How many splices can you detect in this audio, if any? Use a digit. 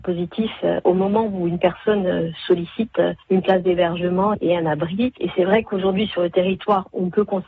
0